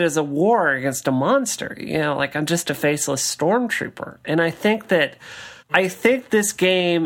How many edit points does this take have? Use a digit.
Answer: 1